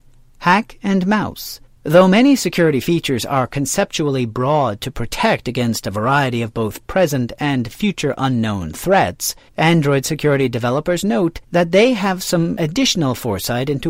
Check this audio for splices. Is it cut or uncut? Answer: cut